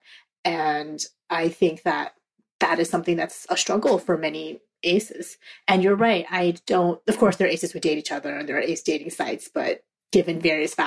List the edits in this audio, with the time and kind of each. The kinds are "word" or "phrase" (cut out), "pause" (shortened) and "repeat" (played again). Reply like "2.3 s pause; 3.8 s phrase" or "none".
none